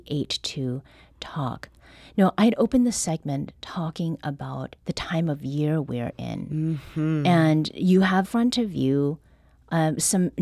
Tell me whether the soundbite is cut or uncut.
cut